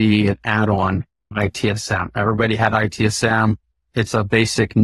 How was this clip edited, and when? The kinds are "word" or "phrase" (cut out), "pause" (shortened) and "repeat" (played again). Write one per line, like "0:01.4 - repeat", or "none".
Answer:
0:01.3 - word